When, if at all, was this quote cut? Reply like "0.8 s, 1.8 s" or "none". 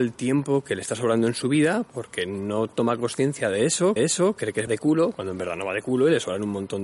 4.0 s, 4.7 s